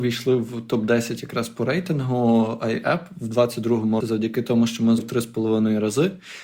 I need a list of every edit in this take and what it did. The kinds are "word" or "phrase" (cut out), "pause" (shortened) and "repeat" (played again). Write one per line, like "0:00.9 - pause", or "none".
0:04.0 - word
0:05.0 - word